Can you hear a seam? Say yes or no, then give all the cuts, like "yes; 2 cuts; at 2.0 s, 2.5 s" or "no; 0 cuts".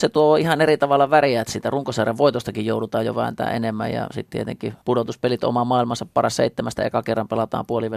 yes; 1 cut; at 4.8 s